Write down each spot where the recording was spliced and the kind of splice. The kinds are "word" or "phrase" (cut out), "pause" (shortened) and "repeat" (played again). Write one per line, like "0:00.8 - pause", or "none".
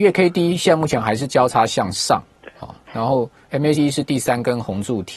0:03.8 - word